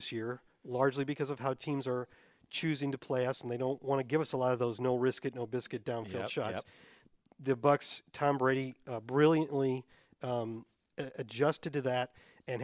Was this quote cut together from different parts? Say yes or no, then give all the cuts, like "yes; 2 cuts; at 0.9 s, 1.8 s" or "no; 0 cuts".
no; 0 cuts